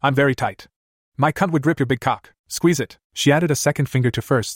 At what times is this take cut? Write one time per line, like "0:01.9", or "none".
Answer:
0:02.4
0:03.0